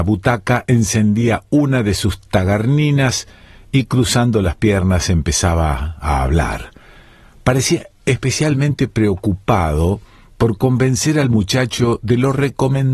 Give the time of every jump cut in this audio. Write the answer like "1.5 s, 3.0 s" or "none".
none